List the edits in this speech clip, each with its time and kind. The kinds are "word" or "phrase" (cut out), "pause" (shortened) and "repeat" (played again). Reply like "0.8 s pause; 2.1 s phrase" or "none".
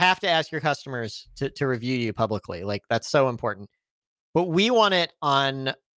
none